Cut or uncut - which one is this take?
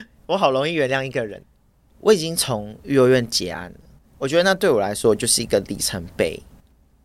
uncut